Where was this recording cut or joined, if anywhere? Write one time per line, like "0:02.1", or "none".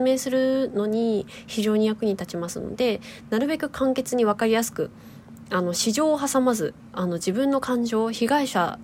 none

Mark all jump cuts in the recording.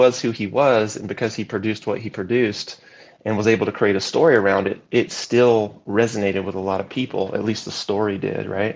none

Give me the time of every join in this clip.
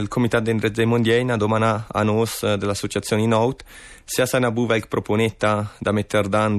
none

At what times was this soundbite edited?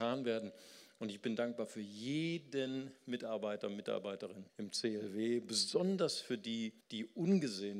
0:04.5
0:06.8

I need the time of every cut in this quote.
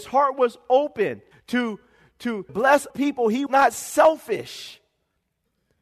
0:01.3
0:02.5
0:02.9
0:03.5

